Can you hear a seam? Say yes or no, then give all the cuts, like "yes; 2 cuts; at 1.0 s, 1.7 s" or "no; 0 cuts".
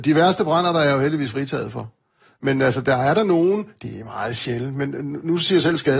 no; 0 cuts